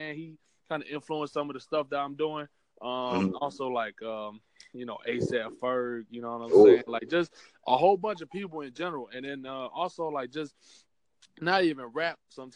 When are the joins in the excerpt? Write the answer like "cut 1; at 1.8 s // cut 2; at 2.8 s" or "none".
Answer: none